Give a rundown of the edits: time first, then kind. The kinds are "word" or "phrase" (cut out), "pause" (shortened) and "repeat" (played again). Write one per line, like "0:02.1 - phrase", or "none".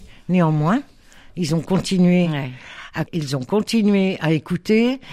0:03.1 - word